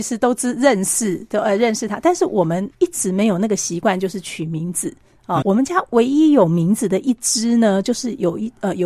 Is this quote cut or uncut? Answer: cut